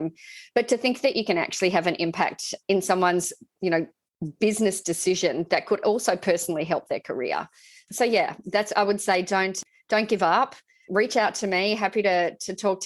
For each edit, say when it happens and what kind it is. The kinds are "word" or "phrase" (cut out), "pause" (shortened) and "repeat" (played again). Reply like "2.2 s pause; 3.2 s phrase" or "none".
none